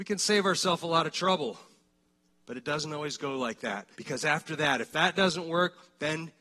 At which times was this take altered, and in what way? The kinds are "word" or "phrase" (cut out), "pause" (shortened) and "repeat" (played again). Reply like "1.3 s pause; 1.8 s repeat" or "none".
3.9 s pause